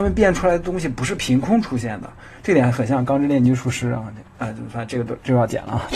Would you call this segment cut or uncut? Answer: uncut